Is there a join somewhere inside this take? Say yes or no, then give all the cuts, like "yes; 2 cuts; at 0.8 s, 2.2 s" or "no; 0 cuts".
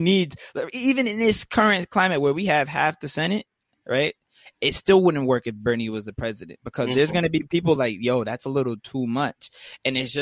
no; 0 cuts